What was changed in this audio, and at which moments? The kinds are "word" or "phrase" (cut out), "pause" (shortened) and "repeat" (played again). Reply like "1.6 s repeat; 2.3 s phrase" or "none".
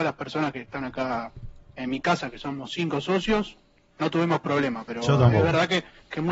none